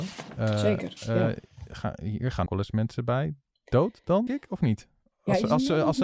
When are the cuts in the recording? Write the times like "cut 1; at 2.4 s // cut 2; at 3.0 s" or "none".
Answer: cut 1; at 2.5 s // cut 2; at 4.3 s